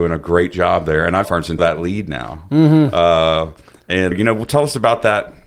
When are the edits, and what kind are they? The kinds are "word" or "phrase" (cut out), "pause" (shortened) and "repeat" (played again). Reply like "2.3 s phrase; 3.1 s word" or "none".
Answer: 1.2 s phrase; 1.6 s phrase; 4.1 s word